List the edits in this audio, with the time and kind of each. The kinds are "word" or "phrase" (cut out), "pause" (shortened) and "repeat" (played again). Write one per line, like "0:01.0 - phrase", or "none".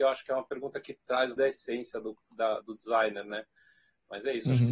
0:01.4 - word
0:02.6 - word